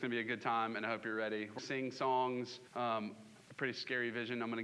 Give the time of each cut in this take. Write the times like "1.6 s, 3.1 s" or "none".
1.6 s, 2.7 s, 3.4 s